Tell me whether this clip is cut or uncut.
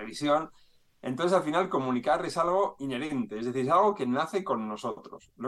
uncut